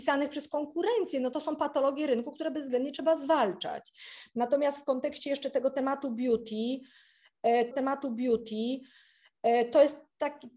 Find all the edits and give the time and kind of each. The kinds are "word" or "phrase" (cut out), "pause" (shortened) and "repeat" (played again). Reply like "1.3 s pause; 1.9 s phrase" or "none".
1.3 s phrase; 7.7 s repeat